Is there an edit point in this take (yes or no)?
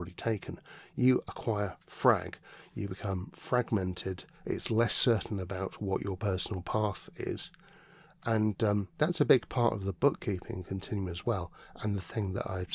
no